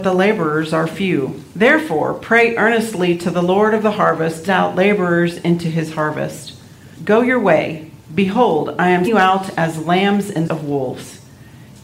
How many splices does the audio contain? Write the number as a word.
six